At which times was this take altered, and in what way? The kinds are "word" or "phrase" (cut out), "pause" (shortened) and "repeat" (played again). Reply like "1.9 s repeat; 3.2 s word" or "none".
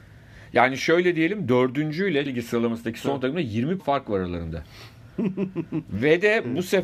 2.3 s word; 3.8 s word